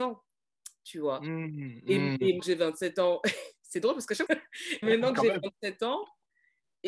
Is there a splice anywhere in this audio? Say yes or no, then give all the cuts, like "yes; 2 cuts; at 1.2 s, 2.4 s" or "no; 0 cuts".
yes; 3 cuts; at 2.4 s, 4.3 s, 4.8 s